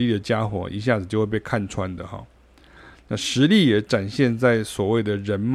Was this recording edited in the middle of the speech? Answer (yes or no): no